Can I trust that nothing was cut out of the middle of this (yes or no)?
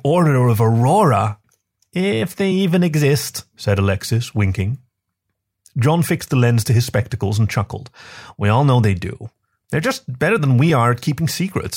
yes